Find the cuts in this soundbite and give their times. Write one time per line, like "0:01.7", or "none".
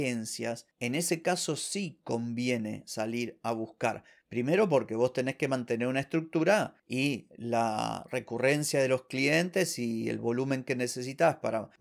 none